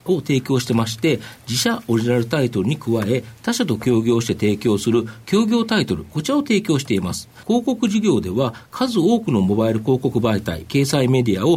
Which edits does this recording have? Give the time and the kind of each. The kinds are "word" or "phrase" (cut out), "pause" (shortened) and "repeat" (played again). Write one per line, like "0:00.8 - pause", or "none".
0:07.4 - pause